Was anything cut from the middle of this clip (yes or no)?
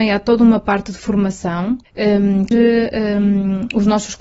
yes